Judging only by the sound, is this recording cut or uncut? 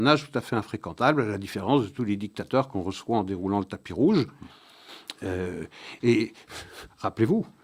uncut